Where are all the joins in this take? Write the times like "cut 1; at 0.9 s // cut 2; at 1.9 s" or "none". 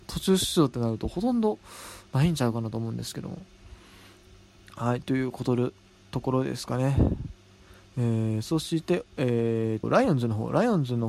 cut 1; at 9.8 s